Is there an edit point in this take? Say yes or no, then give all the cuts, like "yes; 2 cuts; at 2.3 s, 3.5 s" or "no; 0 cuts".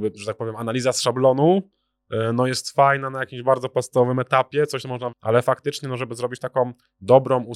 yes; 1 cut; at 5.1 s